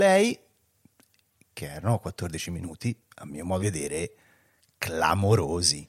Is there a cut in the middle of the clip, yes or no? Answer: yes